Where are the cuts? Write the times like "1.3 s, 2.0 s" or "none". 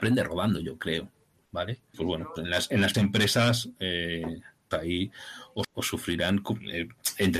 1.9 s, 2.4 s, 2.9 s, 4.7 s, 5.6 s